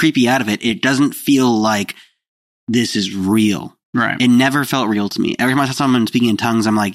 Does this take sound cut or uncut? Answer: uncut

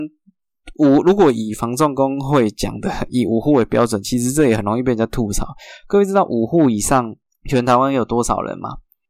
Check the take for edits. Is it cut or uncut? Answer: cut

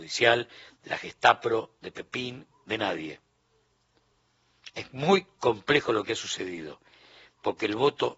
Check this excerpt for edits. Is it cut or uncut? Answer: uncut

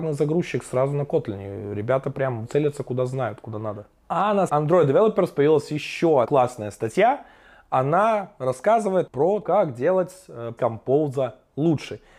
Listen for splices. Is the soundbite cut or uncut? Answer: cut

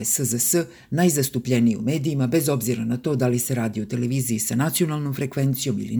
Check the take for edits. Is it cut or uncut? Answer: uncut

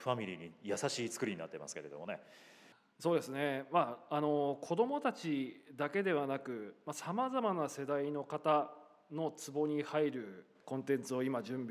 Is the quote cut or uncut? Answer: uncut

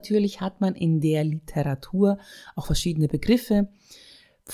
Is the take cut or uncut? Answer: uncut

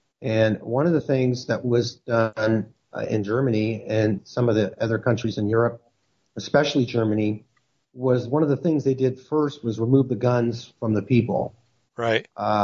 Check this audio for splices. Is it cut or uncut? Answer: uncut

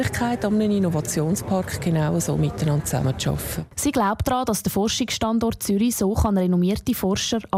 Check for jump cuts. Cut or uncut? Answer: uncut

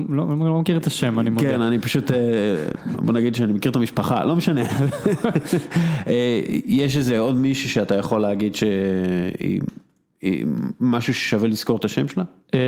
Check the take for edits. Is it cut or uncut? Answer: uncut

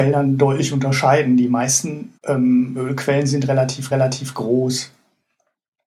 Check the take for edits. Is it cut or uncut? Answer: cut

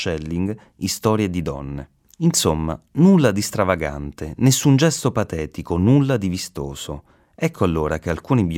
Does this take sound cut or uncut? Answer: uncut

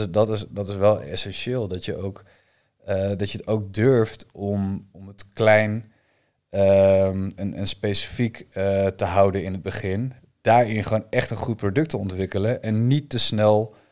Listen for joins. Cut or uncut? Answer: uncut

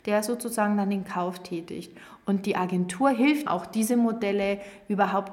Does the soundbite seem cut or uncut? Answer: cut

